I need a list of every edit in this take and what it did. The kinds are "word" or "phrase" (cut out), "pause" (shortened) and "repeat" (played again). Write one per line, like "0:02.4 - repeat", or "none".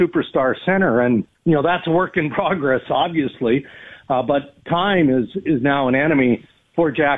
0:01.4 - pause